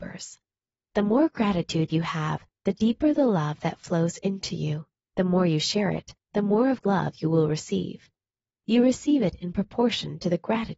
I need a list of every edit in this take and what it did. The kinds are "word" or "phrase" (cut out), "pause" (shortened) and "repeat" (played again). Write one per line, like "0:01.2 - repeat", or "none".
0:04.9 - pause
0:06.8 - word